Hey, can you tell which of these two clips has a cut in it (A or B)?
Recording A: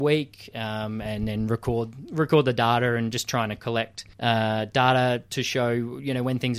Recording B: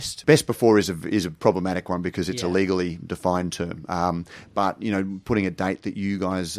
A